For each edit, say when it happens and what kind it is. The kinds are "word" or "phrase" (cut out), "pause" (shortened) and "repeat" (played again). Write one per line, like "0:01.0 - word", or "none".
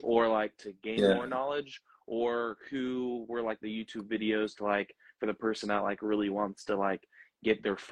none